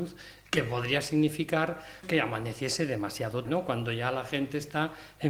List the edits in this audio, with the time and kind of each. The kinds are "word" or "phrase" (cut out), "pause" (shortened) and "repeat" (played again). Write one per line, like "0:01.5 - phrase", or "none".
0:02.0 - word
0:03.5 - word